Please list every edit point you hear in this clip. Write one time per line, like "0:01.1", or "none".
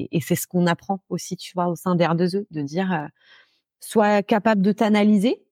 none